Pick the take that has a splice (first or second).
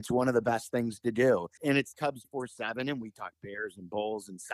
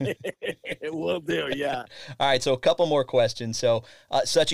first